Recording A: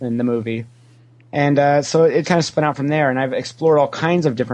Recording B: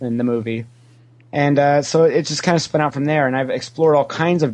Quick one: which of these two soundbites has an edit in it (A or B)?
A